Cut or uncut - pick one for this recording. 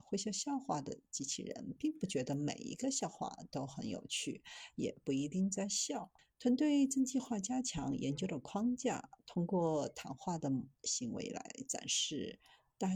cut